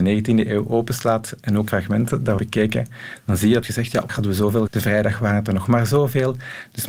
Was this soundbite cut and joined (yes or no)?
yes